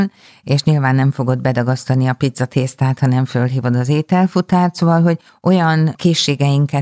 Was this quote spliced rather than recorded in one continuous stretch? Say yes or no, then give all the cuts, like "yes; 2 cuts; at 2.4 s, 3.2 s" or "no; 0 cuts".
no; 0 cuts